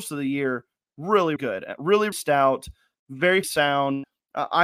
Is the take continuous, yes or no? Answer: no